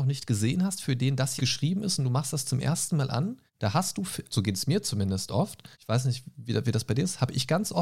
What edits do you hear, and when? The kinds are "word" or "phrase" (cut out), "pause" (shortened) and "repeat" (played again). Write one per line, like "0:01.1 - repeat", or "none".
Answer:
0:01.4 - word
0:03.5 - pause
0:04.3 - word
0:05.7 - pause